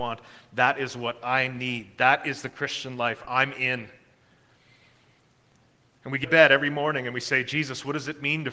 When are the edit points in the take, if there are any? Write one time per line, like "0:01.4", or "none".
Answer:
0:03.2
0:06.2